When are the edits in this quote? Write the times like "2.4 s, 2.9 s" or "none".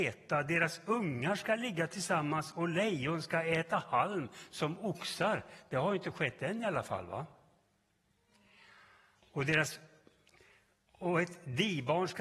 none